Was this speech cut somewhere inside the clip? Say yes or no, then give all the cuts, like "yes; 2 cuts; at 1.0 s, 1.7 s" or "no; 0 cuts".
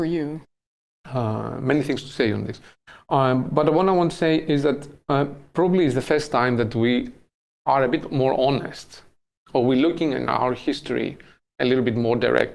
no; 0 cuts